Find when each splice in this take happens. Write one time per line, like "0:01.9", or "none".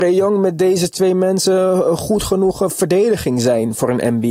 none